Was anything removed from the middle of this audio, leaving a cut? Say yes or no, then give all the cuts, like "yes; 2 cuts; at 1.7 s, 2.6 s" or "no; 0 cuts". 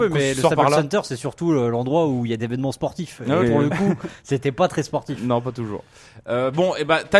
yes; 2 cuts; at 2.4 s, 3.4 s